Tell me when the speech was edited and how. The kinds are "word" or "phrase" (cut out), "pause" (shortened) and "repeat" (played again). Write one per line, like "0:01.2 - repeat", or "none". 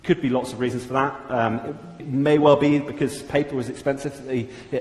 0:02.0 - word